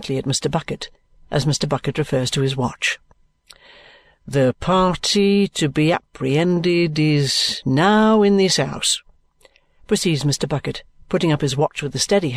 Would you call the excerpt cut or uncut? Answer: uncut